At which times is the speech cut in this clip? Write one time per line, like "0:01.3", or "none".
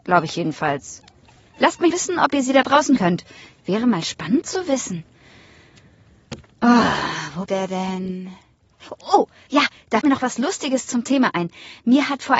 0:01.9
0:03.0
0:07.5
0:09.5
0:10.0